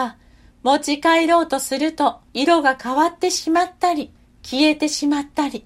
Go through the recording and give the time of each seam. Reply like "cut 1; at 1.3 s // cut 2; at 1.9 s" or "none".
cut 1; at 2.3 s // cut 2; at 4.2 s